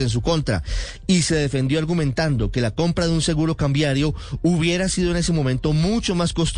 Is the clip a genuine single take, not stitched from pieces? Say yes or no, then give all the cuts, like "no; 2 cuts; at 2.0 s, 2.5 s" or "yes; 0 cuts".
yes; 0 cuts